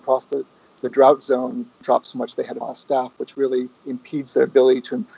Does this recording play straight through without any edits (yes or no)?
no